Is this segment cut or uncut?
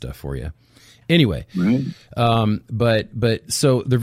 uncut